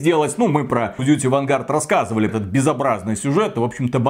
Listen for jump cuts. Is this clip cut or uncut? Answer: cut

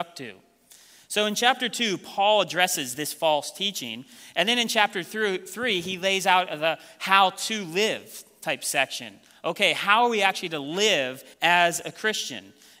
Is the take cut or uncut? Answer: cut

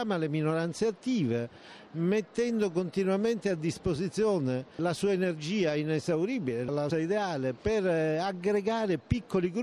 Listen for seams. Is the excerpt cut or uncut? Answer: cut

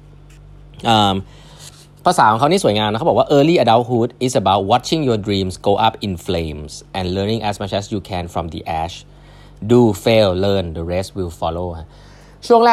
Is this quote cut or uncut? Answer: uncut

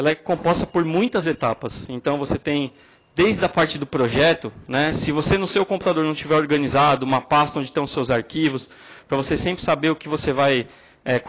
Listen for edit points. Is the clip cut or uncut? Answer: uncut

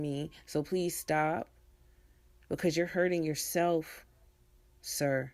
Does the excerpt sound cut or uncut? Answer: uncut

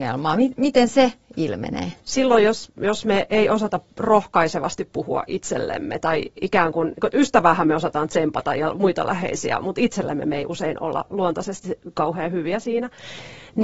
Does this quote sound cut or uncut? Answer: cut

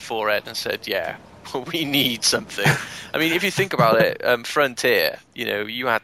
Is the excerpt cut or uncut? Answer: uncut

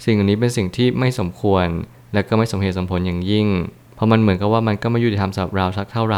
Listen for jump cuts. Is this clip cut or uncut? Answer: uncut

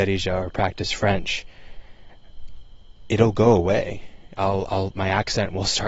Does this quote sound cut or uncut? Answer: uncut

